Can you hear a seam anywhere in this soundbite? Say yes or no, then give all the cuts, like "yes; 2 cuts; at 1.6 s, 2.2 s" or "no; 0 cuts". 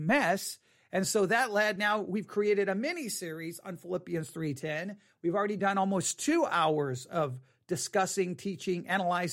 no; 0 cuts